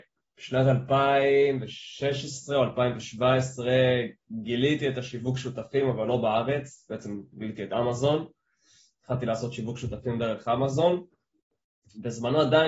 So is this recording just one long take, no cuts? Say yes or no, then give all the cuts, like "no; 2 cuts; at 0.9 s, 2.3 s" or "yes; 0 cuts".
yes; 0 cuts